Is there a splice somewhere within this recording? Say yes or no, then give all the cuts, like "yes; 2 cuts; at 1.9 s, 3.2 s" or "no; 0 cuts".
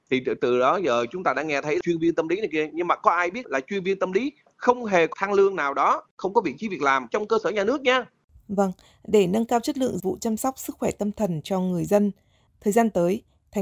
yes; 3 cuts; at 3.4 s, 5.1 s, 10.0 s